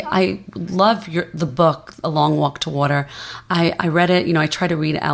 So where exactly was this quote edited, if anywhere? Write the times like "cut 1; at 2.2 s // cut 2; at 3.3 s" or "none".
none